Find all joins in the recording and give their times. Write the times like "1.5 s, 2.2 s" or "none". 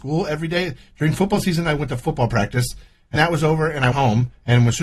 3.2 s, 3.9 s